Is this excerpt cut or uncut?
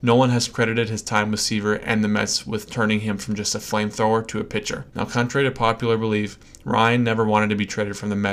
cut